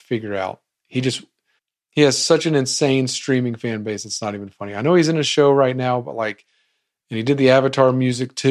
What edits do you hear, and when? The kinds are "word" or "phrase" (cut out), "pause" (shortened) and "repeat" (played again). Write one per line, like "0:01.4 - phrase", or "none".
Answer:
0:01.6 - pause